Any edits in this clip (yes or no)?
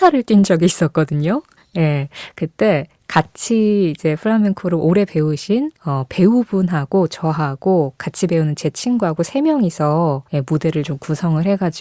yes